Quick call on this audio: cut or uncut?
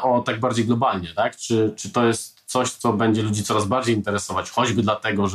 uncut